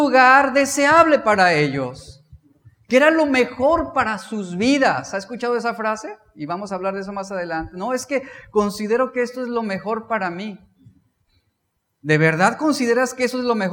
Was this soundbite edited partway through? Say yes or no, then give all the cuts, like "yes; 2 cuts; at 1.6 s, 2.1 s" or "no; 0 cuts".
no; 0 cuts